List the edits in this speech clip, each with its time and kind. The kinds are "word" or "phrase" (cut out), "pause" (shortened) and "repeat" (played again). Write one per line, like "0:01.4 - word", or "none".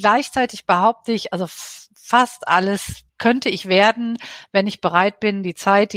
0:03.1 - pause